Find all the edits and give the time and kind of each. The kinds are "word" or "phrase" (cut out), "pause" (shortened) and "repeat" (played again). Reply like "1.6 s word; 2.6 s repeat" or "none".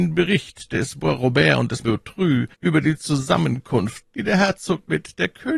1.8 s phrase; 2.5 s pause; 4.0 s word